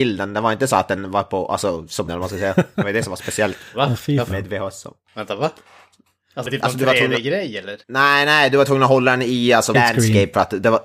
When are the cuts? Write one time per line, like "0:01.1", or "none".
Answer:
0:02.1
0:06.5
0:07.8
0:09.7